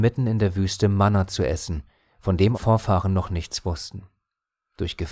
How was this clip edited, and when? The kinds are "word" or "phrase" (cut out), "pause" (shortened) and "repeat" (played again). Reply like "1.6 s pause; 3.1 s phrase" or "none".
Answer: 2.5 s word